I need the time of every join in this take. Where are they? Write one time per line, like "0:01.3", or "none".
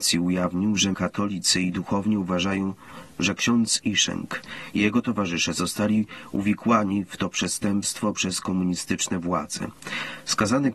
0:00.9